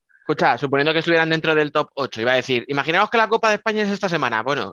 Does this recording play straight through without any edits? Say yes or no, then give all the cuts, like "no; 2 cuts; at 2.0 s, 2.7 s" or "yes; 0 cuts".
yes; 0 cuts